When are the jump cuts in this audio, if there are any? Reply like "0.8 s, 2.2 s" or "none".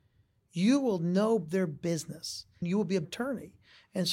3.0 s